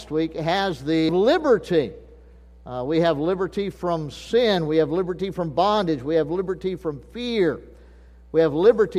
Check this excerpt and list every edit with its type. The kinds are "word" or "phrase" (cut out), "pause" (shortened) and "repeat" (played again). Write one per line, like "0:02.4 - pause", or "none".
0:01.1 - phrase

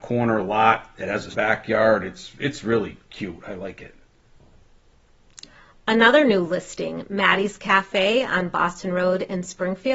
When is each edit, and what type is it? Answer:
0:01.3 - phrase

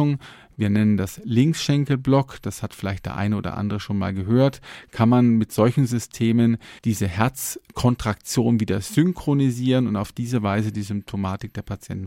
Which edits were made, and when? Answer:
0:06.8 - pause

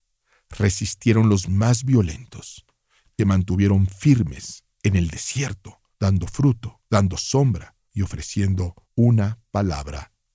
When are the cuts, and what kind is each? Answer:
0:01.5 - word
0:03.2 - word
0:04.7 - pause
0:05.9 - pause
0:06.9 - pause
0:07.8 - pause
0:08.8 - pause

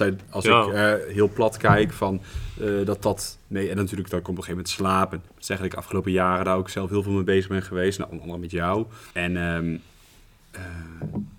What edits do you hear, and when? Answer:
0:05.3 - pause
0:09.1 - pause

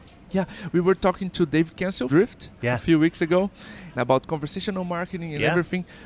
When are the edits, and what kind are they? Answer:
0:02.1 - word
0:03.9 - word

